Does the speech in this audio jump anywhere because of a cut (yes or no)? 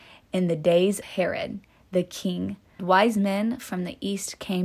yes